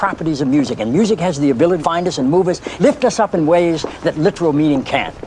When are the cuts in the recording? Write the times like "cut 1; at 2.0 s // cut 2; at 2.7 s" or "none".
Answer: cut 1; at 1.8 s // cut 2; at 2.8 s